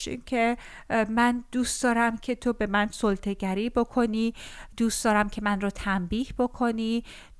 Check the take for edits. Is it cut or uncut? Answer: uncut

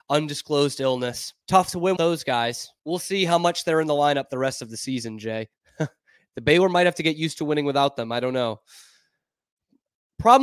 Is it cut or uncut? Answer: cut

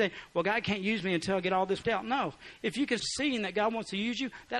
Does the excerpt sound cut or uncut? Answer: cut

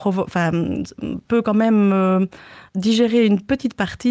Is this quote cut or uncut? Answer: cut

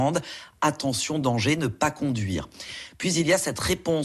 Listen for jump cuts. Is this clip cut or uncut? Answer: uncut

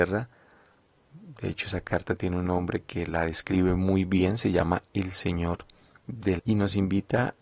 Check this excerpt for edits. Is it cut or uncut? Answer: cut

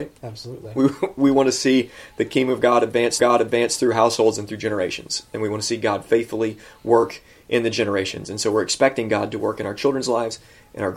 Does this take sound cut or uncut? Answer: cut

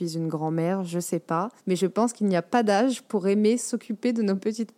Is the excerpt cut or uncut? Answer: cut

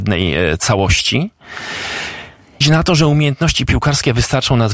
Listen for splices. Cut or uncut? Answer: cut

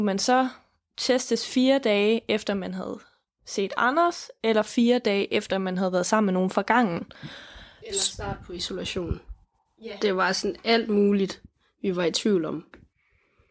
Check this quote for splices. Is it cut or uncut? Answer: uncut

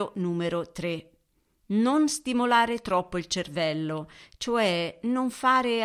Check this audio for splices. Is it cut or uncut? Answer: uncut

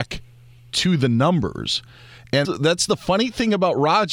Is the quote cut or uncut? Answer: cut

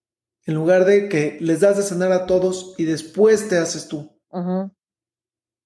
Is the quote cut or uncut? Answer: cut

